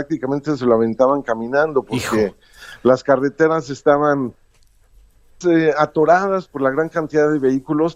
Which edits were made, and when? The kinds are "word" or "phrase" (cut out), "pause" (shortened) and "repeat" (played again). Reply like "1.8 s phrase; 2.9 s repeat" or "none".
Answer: 5.4 s word